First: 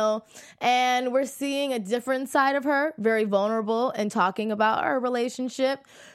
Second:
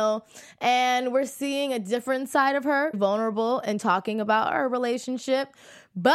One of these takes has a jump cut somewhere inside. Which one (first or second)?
second